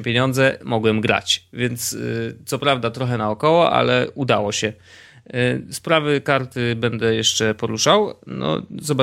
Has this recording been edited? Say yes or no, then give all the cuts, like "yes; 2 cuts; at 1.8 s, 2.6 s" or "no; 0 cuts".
no; 0 cuts